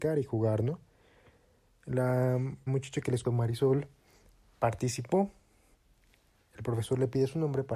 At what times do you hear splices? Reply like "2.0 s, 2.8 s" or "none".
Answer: 2.7 s, 3.2 s